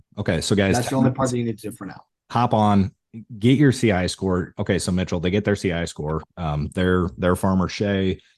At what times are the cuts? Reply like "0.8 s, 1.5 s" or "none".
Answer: none